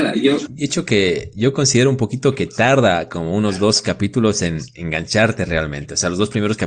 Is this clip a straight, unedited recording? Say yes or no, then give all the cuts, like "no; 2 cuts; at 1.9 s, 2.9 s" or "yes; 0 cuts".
yes; 0 cuts